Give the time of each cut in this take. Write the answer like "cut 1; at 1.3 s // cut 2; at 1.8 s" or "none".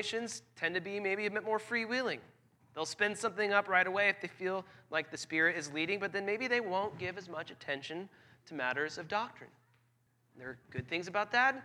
none